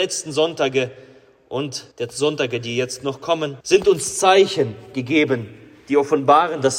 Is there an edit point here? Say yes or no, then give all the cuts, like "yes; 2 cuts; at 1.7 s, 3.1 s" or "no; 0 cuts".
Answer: yes; 2 cuts; at 1.9 s, 3.6 s